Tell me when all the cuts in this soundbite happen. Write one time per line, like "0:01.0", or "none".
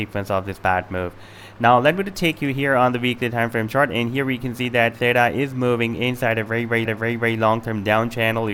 0:06.9